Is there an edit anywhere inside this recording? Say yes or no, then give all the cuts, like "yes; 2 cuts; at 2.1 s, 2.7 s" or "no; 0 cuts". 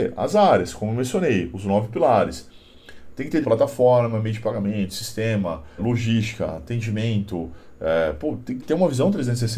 yes; 3 cuts; at 3.4 s, 5.8 s, 8.6 s